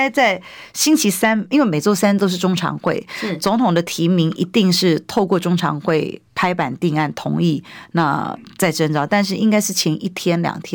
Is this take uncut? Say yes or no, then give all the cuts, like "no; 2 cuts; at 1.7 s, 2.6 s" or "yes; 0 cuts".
yes; 0 cuts